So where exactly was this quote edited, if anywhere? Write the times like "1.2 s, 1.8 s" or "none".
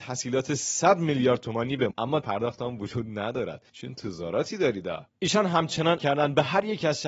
1.9 s, 2.2 s, 3.7 s, 5.1 s, 6.0 s